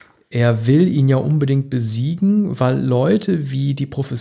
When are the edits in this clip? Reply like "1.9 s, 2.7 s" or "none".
none